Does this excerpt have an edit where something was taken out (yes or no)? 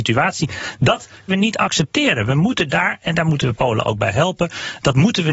yes